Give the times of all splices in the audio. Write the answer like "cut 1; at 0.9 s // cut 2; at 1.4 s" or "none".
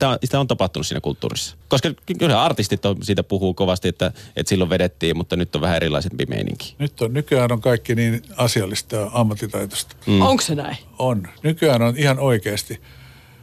cut 1; at 1.6 s